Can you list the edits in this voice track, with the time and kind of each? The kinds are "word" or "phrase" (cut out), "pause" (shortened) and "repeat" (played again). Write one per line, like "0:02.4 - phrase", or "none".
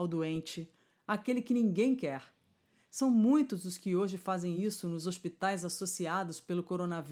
none